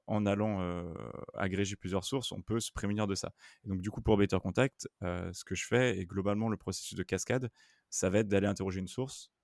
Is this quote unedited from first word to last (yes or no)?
yes